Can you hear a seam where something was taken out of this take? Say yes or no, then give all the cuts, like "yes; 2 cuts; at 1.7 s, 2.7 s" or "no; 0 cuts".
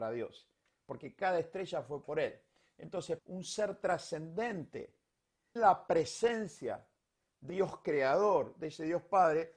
yes; 4 cuts; at 2.0 s, 3.2 s, 5.6 s, 7.5 s